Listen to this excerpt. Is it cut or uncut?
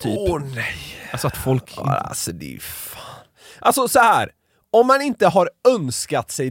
uncut